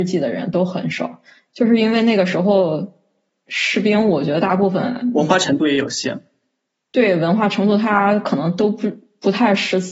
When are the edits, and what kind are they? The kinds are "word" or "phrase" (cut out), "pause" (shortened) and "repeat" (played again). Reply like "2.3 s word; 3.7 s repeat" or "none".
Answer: none